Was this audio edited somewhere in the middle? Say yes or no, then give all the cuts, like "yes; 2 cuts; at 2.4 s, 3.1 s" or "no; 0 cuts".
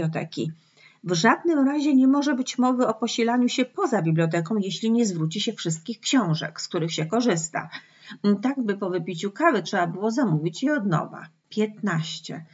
yes; 1 cut; at 11.4 s